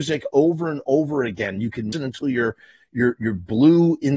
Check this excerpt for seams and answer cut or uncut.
cut